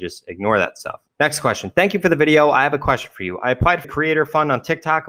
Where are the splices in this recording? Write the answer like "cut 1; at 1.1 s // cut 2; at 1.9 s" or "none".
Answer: cut 1; at 3.8 s